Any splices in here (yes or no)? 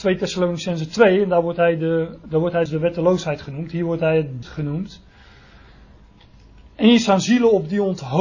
yes